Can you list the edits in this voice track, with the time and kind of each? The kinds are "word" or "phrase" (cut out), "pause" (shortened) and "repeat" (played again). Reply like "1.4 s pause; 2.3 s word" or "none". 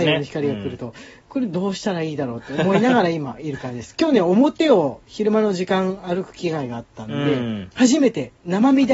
none

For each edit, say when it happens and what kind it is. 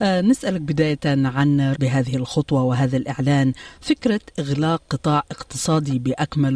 1.7 s word

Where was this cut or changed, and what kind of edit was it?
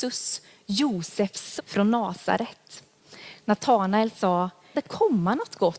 1.6 s word; 4.7 s word

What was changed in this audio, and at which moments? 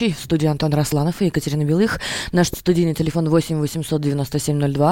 none

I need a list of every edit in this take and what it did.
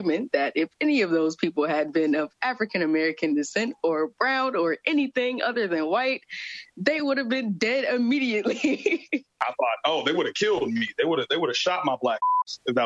none

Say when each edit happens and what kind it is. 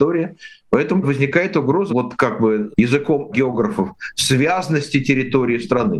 1.0 s word; 1.9 s word; 2.7 s word; 3.3 s word

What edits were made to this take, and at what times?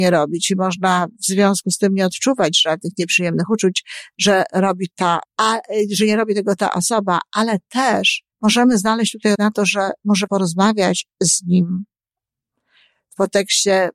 4.9 s word; 5.2 s word; 8.3 s pause; 9.3 s word; 10.3 s word

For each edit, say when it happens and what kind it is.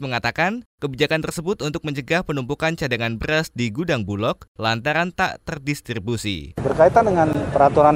none

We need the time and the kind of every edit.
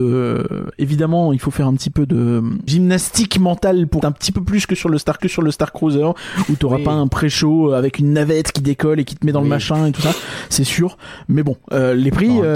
2.7 s word; 4.0 s phrase; 5.2 s repeat

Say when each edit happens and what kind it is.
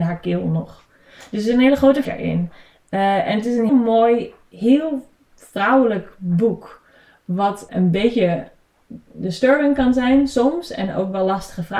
2.0 s word; 3.7 s word; 7.7 s word

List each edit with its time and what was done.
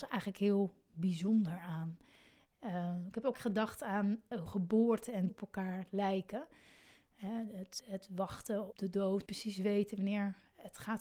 3.3 s word; 4.5 s word; 5.3 s word; 7.8 s word; 8.7 s word; 9.3 s word

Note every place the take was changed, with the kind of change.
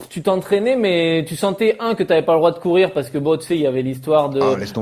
none

